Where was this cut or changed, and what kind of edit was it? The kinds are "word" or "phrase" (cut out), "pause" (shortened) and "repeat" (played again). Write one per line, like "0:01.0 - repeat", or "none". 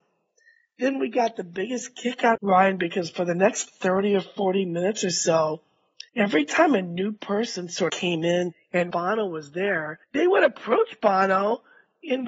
0:02.4 - phrase
0:06.1 - pause
0:07.9 - word
0:08.9 - word
0:10.0 - pause

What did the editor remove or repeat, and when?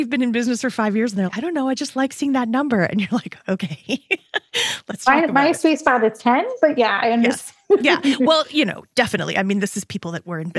0:01.3 - word
0:07.6 - pause

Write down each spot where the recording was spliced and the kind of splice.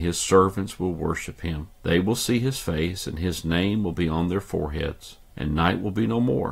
0:01.7 - pause
0:05.2 - pause

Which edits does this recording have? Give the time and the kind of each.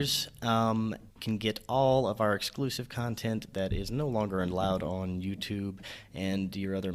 0:01.1 - phrase

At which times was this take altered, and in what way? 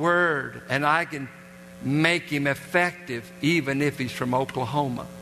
none

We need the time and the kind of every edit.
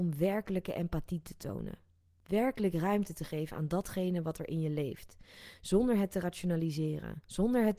none

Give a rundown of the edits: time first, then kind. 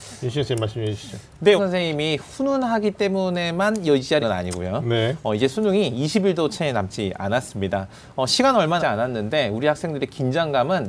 0:01.6 - phrase
0:04.2 - word
0:08.8 - word

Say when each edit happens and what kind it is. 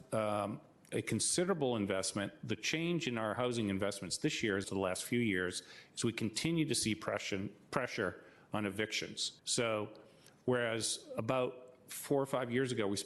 0:04.6 - word
0:09.4 - pause

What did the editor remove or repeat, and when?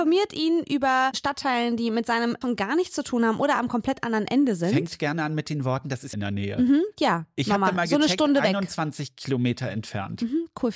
0:01.1 - phrase
0:02.4 - word
0:06.1 - phrase

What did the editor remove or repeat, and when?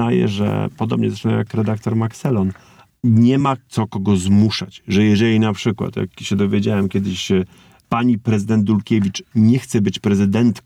none

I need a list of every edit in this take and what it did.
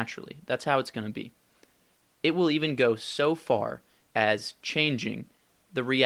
none

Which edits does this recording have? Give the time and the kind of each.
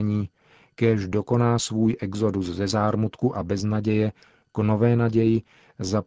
none

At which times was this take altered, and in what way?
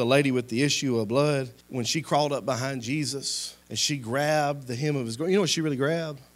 0:01.6 - pause
0:03.6 - pause

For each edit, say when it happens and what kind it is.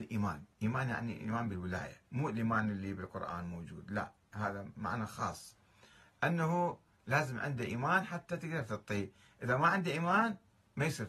0:02.0 - pause

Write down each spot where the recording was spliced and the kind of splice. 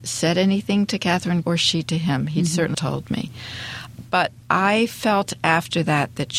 0:01.4 - word
0:02.7 - word
0:04.4 - pause

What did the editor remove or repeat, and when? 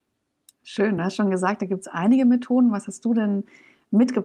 none

